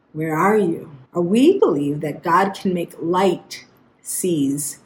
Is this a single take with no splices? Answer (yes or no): no